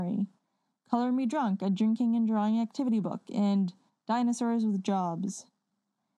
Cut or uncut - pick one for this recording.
uncut